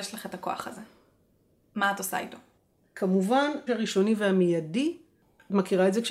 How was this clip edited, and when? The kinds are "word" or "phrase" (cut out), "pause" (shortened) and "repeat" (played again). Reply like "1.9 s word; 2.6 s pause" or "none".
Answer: 3.7 s word

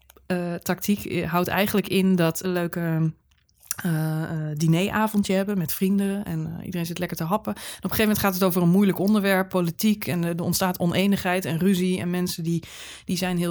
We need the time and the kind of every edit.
2.4 s phrase

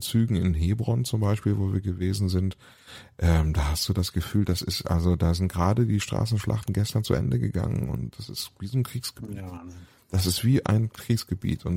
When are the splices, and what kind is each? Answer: none

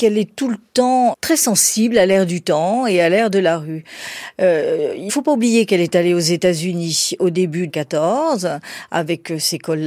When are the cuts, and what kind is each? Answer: 1.1 s word; 5.1 s word; 7.7 s phrase

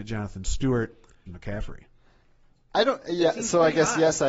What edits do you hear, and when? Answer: 1.3 s phrase

